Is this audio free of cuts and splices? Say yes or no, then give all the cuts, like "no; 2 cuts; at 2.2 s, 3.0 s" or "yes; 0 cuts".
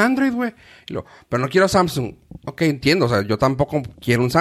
yes; 0 cuts